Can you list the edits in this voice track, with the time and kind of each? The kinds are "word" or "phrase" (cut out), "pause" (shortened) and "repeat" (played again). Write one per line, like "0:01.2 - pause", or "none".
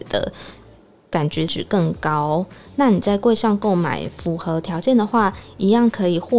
0:01.5 - word